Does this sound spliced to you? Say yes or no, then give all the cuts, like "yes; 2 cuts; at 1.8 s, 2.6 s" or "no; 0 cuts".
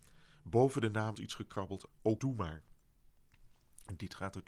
yes; 3 cuts; at 1.1 s, 1.9 s, 2.2 s